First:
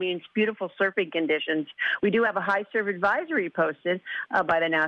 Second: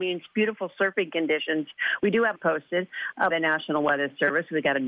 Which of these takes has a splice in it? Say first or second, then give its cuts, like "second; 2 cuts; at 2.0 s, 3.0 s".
second; 2 cuts; at 2.4 s, 3.3 s